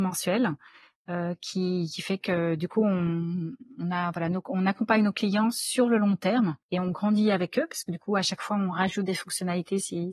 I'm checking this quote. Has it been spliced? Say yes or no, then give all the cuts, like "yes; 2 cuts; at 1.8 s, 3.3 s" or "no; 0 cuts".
yes; 1 cut; at 6.6 s